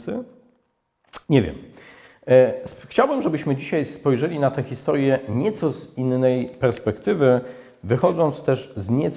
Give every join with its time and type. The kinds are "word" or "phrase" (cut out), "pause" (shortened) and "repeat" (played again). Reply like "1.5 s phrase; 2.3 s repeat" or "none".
1.2 s pause